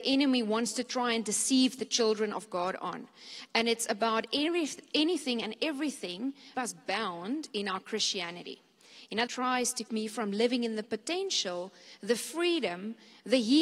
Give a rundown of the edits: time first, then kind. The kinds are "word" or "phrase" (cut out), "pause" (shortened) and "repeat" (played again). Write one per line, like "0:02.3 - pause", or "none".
0:06.5 - phrase
0:09.3 - phrase
0:09.9 - word